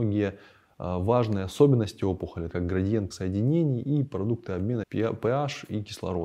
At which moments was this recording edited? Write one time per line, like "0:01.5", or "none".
0:02.5
0:03.1
0:04.8